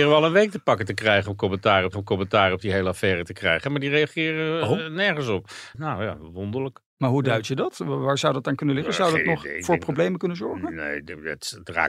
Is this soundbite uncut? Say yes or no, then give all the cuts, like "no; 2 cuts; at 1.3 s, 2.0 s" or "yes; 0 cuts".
no; 1 cut; at 1.9 s